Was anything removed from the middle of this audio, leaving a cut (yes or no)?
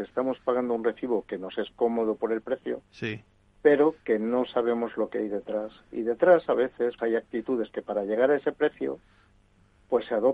yes